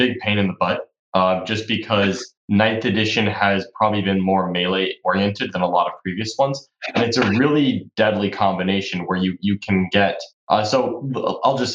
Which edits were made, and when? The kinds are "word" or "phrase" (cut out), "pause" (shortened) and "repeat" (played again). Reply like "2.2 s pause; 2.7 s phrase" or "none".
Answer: 2.4 s pause